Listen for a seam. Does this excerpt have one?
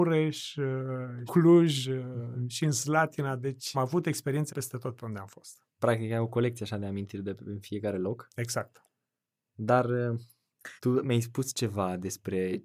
yes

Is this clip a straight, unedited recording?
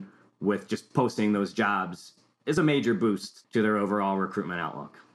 yes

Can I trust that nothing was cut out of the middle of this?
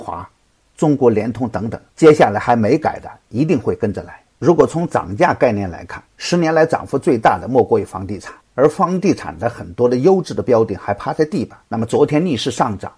no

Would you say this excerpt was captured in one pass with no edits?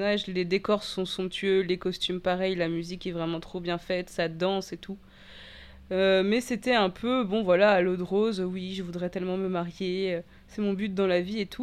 yes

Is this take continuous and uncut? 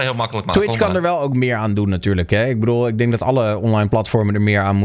yes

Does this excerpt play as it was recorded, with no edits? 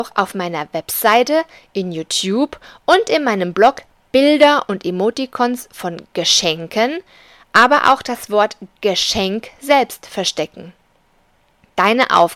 yes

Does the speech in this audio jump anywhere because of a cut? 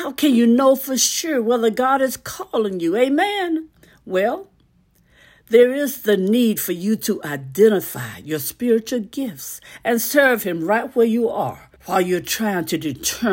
yes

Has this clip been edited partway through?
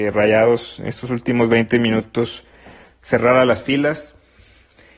no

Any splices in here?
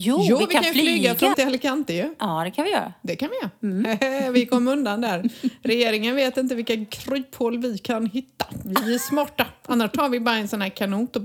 yes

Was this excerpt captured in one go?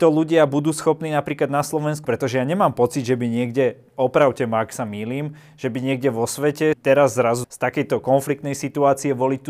no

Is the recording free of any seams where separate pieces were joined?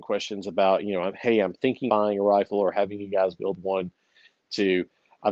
no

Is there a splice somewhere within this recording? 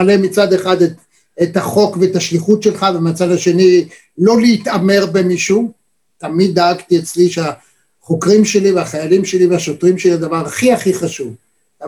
no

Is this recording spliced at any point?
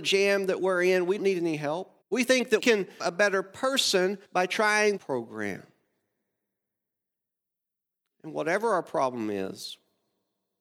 yes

